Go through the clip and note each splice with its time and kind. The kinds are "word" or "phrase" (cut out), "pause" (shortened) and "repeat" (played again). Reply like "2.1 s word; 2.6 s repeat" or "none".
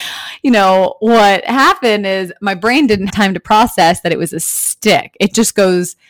3.1 s word